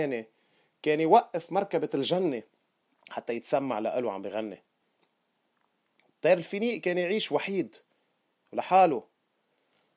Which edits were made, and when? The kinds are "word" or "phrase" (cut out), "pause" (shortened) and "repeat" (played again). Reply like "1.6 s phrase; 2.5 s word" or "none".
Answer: none